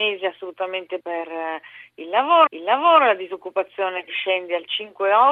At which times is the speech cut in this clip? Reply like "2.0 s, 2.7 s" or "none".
1.0 s, 2.5 s, 4.1 s